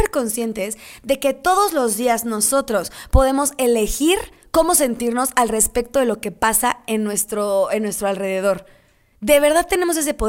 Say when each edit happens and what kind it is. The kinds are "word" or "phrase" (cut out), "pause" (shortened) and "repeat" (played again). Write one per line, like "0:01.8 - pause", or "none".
none